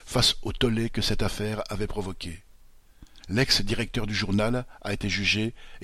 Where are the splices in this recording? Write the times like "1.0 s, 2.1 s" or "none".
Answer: 3.2 s